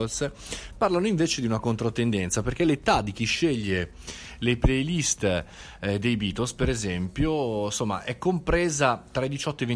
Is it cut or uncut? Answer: uncut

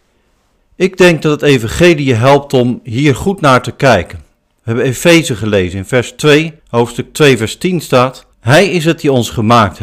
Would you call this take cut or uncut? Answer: cut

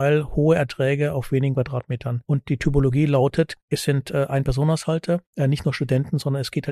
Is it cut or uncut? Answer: cut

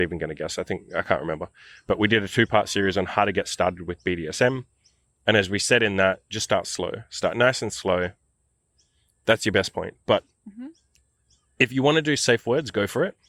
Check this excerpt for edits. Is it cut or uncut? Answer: uncut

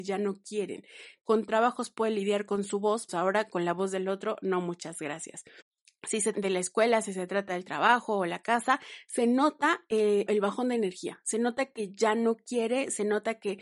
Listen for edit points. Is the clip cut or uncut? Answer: cut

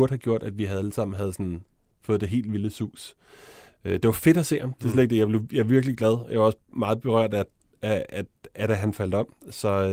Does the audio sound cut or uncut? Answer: uncut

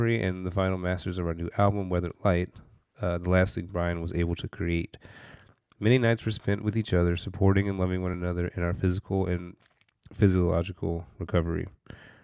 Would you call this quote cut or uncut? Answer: uncut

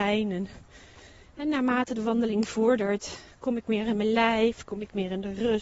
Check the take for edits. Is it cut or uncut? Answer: uncut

